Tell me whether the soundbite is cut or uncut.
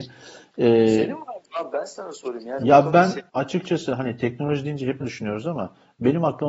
cut